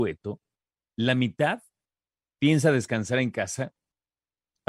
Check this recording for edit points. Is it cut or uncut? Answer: uncut